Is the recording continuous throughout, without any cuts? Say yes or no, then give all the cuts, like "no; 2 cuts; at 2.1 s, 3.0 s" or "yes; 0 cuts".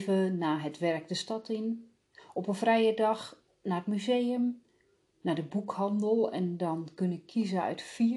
yes; 0 cuts